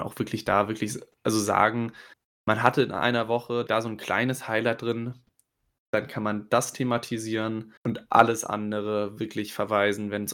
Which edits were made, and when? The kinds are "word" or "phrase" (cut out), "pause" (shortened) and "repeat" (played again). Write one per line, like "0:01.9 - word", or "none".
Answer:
0:02.1 - pause
0:03.7 - phrase
0:07.8 - pause